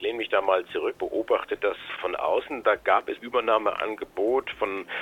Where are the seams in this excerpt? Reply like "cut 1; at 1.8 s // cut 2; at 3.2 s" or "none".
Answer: cut 1; at 0.9 s // cut 2; at 2.0 s // cut 3; at 3.2 s